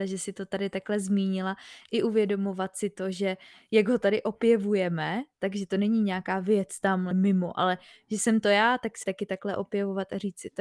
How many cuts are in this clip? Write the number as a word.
two